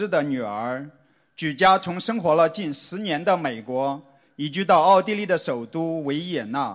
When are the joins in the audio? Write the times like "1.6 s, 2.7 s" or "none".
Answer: none